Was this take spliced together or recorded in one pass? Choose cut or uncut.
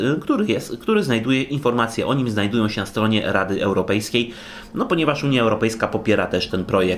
uncut